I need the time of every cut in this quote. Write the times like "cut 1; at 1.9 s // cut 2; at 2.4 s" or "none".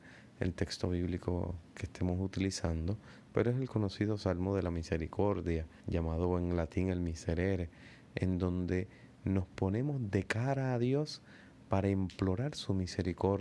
cut 1; at 5.8 s

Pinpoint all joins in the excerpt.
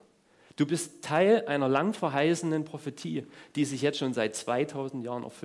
none

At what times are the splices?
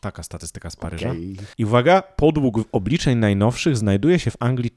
cut 1; at 1.5 s

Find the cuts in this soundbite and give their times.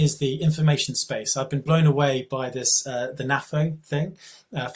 none

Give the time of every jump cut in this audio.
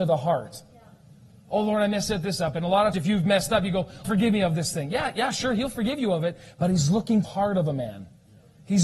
cut 1; at 2.9 s // cut 2; at 4.0 s // cut 3; at 7.2 s

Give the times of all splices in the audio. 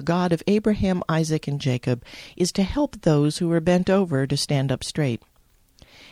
none

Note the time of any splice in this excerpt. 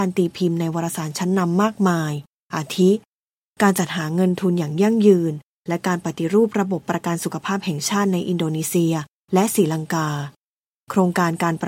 none

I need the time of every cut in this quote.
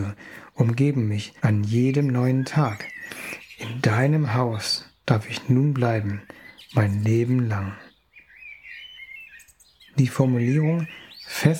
cut 1; at 1.4 s

